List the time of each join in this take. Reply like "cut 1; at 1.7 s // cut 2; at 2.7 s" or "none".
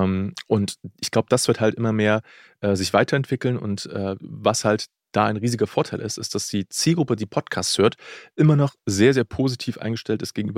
none